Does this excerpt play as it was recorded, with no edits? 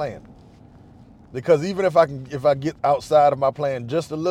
yes; 0 cuts

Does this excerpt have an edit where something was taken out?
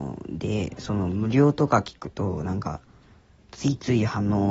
no; 0 cuts

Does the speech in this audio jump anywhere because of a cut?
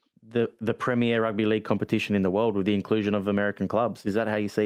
no; 0 cuts

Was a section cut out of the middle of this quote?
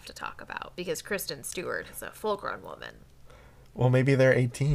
no; 0 cuts

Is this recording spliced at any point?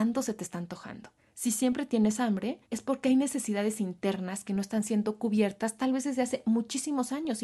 yes; 2 cuts; at 1.2 s, 2.6 s

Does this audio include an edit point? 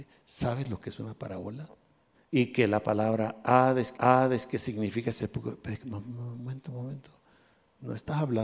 yes; 2 cuts; at 2.1 s, 4.0 s

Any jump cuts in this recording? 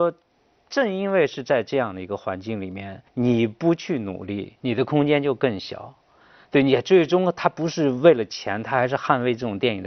yes; 1 cut; at 3.1 s

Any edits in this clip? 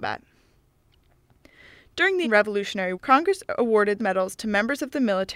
yes; 3 cuts; at 2.2 s, 2.9 s, 4.0 s

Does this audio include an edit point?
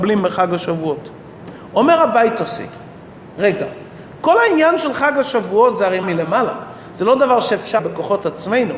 yes; 2 cuts; at 6.0 s, 7.8 s

